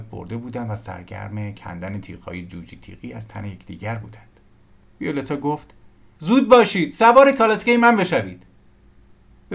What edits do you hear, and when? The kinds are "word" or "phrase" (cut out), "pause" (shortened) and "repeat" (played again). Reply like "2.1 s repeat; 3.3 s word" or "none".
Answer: none